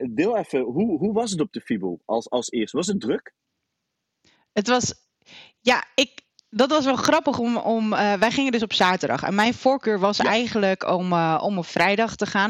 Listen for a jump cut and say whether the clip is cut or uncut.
uncut